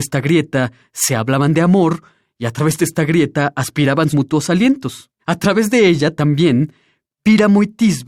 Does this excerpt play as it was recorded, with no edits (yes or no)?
no